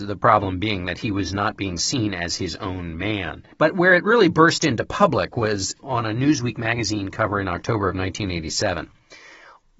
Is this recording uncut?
no; 1 cut; at 3.5 s

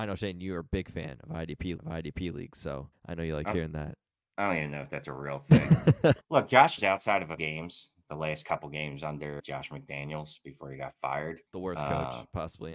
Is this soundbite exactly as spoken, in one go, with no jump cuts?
no; 7 cuts; at 1.8 s, 2.9 s, 6.2 s, 6.8 s, 7.4 s, 9.4 s, 11.5 s

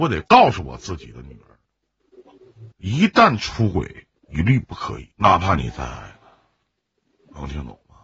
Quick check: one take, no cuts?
no; 3 cuts; at 2.7 s, 4.2 s, 5.1 s

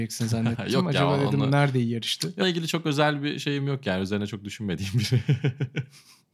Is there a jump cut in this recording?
yes; 1 cut; at 2.4 s

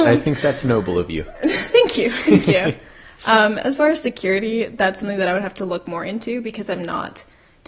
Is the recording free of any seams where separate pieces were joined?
yes; 0 cuts

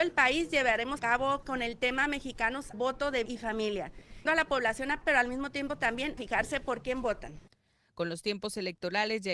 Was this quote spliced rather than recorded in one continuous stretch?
yes; 7 cuts; at 1.0 s, 1.4 s, 2.7 s, 3.3 s, 4.3 s, 5.0 s, 6.2 s

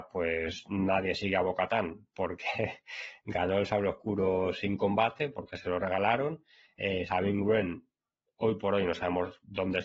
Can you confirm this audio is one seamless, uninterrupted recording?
yes; 0 cuts

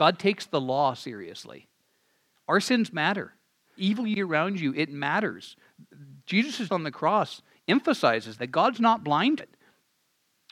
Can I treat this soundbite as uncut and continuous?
no; 5 cuts; at 3.8 s, 4.2 s, 6.7 s, 8.4 s, 9.4 s

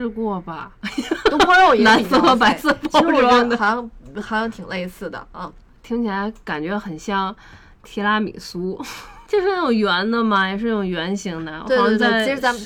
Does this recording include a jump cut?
no; 0 cuts

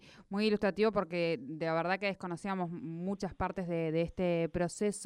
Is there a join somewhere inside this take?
no; 0 cuts

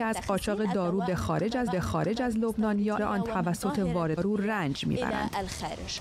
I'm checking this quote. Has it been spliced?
yes; 3 cuts; at 1.7 s, 3.0 s, 4.2 s

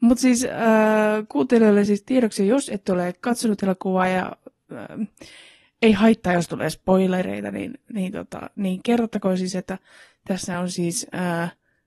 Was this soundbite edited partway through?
no; 0 cuts

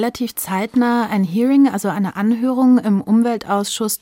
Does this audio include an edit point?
no; 0 cuts

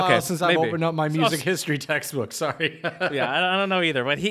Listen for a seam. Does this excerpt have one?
no; 0 cuts

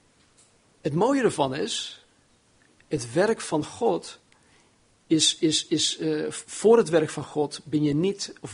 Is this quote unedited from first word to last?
yes; 0 cuts

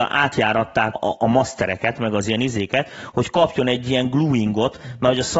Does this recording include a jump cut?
yes; 1 cut; at 0.9 s

